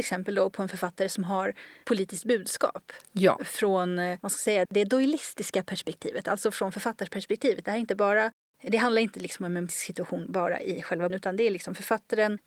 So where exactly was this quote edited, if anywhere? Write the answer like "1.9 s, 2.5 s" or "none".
1.8 s, 4.7 s, 9.7 s, 11.1 s